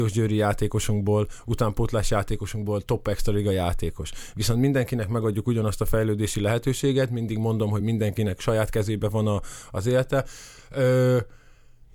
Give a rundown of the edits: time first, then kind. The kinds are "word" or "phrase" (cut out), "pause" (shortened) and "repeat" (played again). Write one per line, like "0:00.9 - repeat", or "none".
none